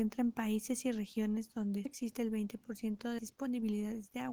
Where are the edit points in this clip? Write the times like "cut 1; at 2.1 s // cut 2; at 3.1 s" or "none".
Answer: cut 1; at 1.9 s // cut 2; at 3.2 s